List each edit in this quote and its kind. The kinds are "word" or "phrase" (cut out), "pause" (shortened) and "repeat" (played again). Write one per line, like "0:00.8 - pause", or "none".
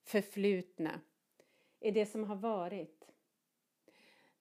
none